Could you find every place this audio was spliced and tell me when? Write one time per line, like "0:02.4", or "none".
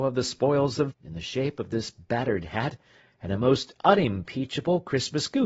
0:00.9